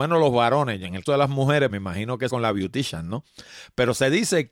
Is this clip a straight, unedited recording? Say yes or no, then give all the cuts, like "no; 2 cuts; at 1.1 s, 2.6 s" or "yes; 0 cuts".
no; 3 cuts; at 1.1 s, 1.7 s, 2.3 s